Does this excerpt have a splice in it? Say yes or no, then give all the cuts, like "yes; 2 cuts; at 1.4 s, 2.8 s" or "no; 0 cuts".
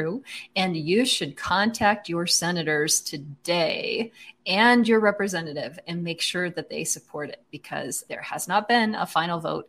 yes; 1 cut; at 8.1 s